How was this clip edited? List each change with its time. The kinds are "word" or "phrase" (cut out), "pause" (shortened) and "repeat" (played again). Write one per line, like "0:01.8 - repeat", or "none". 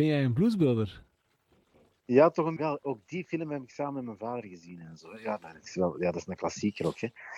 0:02.6 - word